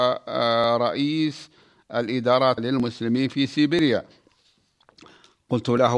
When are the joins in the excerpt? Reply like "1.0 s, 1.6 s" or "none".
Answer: 2.6 s